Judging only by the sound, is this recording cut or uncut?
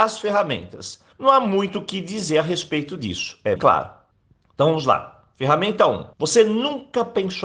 cut